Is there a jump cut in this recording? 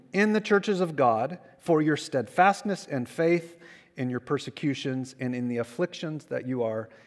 no; 0 cuts

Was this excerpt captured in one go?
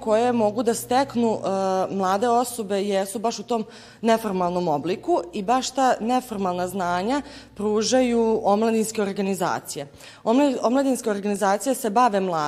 yes; 0 cuts

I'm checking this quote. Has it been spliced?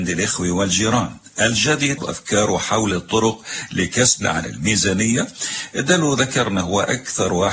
yes; 3 cuts; at 2.0 s, 2.9 s, 4.2 s

